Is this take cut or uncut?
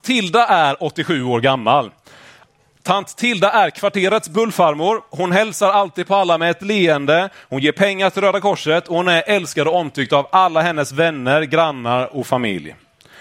uncut